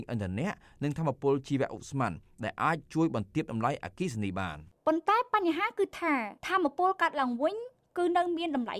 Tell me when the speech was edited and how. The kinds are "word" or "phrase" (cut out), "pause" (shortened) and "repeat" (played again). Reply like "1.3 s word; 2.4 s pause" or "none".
6.4 s pause